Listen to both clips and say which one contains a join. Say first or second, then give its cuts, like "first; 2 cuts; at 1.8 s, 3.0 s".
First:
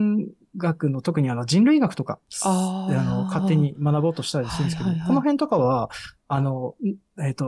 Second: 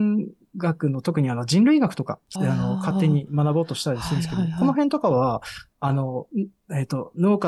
second; 1 cut; at 2.3 s